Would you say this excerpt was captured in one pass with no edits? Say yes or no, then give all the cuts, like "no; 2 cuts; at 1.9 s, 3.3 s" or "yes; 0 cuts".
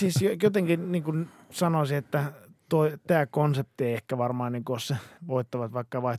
no; 1 cut; at 5.2 s